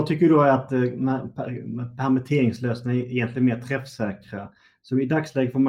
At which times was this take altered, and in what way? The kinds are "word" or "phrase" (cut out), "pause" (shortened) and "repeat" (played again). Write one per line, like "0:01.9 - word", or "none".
none